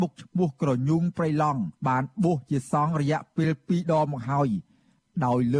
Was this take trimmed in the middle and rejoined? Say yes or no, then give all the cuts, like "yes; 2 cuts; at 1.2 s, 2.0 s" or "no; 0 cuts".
yes; 1 cut; at 1.8 s